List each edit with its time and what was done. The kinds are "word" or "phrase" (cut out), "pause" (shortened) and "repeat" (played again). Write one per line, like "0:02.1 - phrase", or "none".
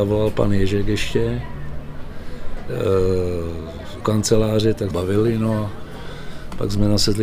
0:04.0 - word
0:04.9 - phrase